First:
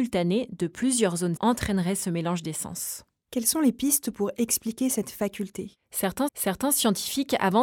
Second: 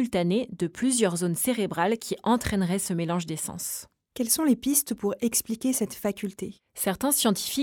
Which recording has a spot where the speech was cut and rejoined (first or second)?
first